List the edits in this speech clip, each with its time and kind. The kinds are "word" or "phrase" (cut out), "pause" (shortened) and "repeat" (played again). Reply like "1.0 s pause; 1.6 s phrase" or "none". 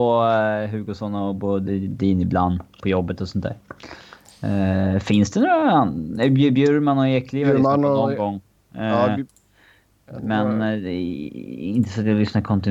none